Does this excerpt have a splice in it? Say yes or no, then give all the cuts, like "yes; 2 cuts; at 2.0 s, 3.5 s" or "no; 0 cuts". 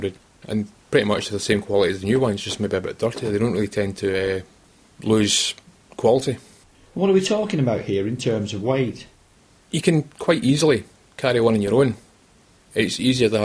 no; 0 cuts